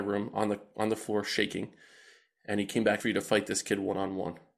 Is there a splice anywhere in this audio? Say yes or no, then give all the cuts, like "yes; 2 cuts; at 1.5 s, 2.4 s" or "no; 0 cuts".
yes; 1 cut; at 3.0 s